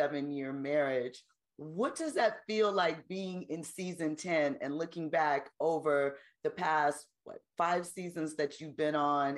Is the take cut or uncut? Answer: uncut